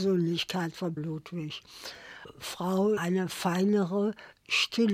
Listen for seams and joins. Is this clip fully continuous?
no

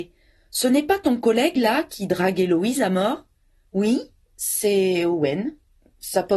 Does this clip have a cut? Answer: no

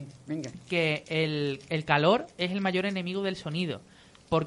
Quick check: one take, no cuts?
yes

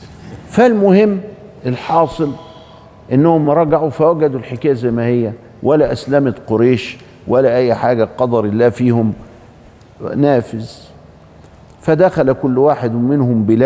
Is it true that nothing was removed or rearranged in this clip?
yes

